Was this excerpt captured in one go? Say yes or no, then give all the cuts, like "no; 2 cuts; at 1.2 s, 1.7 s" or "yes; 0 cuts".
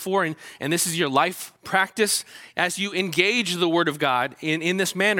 no; 1 cut; at 1.6 s